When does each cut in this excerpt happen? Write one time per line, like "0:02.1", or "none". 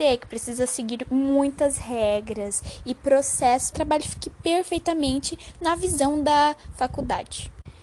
0:03.7